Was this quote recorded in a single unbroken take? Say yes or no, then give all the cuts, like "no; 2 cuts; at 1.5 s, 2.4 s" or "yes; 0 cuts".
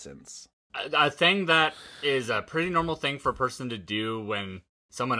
yes; 0 cuts